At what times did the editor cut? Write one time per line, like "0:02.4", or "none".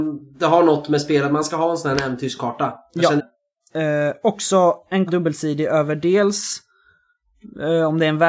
0:03.2
0:05.1